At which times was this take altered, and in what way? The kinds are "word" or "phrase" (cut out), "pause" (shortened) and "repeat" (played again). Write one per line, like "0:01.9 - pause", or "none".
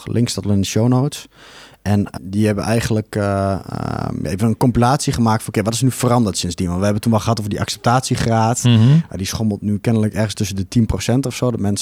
0:02.2 - word